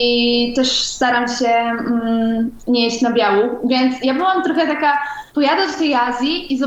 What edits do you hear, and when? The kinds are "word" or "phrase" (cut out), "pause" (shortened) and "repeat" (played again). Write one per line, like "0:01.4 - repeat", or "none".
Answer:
0:05.3 - pause